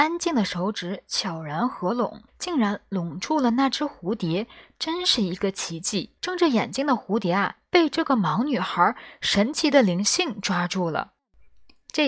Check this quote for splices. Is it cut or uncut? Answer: cut